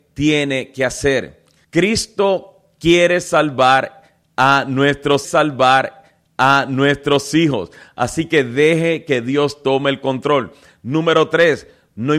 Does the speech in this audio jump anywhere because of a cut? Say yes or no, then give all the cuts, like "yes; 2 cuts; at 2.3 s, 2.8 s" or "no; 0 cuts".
yes; 2 cuts; at 1.6 s, 5.2 s